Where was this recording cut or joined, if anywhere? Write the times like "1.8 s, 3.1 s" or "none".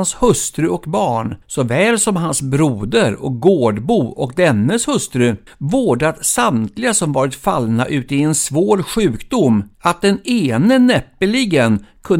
1.4 s, 5.5 s, 9.7 s